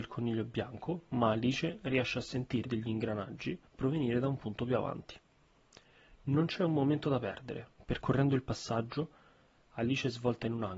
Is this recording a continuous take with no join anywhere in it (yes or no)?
no